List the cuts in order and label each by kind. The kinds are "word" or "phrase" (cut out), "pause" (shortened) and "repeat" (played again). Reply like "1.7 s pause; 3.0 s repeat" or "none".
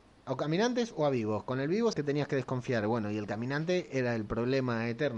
1.9 s word